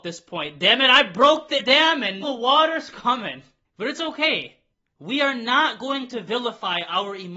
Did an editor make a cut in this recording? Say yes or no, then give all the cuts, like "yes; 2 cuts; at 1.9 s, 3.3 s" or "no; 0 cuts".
yes; 4 cuts; at 1.6 s, 2.2 s, 3.6 s, 4.7 s